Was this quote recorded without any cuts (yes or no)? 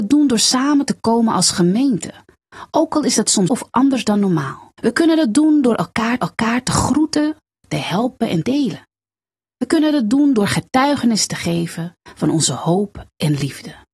no